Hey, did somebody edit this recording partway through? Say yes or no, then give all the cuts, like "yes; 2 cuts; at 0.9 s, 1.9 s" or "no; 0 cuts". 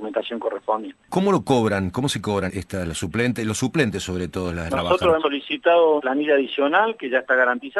yes; 4 cuts; at 2.5 s, 4.7 s, 5.2 s, 6.0 s